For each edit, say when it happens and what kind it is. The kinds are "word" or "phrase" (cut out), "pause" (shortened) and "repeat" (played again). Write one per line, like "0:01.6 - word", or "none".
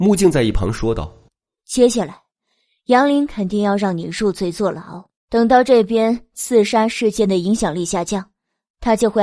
0:05.2 - pause